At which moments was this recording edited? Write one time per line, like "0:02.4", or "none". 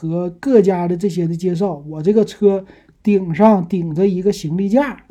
none